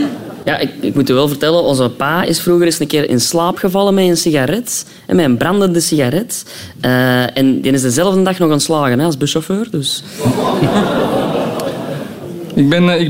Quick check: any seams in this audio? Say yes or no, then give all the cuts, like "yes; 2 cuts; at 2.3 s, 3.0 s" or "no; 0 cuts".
no; 0 cuts